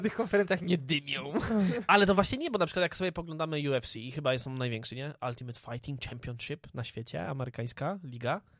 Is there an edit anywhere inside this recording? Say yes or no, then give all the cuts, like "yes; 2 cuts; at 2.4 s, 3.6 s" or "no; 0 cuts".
no; 0 cuts